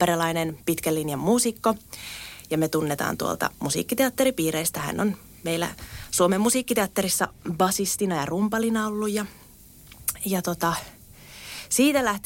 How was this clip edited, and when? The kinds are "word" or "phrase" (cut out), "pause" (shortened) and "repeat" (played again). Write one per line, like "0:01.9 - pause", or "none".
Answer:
none